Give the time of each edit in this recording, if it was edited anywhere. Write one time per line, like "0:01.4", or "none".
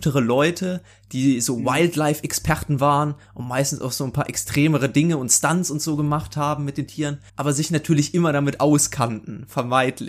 0:07.3

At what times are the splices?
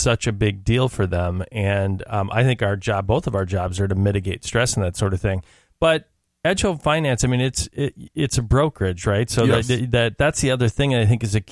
none

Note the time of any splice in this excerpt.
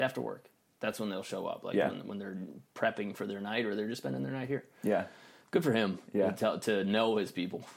none

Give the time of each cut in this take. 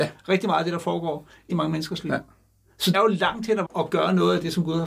0:01.5
0:02.9
0:03.6

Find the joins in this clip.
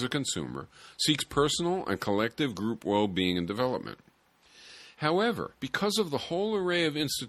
0:05.5

